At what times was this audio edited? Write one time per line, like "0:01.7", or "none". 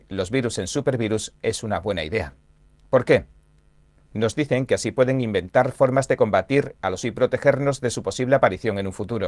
0:07.0